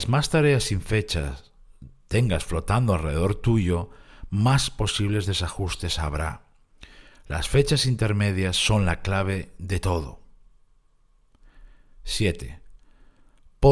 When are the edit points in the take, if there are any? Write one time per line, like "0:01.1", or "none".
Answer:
none